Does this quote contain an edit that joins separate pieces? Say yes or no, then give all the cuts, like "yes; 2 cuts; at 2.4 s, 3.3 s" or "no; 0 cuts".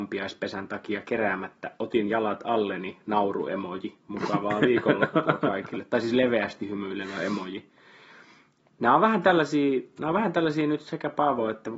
no; 0 cuts